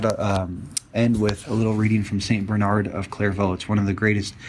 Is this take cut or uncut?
uncut